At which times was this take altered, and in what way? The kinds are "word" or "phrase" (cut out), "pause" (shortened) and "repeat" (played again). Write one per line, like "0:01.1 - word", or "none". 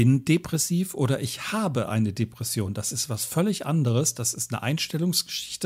none